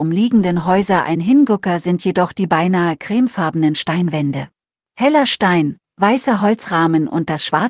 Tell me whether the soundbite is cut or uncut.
cut